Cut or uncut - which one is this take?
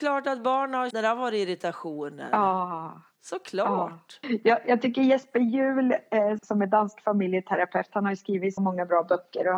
cut